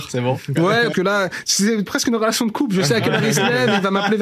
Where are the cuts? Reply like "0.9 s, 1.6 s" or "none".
0.9 s, 1.9 s